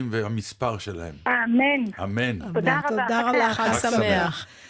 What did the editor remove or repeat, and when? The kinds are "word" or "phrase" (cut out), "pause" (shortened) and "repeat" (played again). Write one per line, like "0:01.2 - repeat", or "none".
0:02.8 - word
0:03.3 - word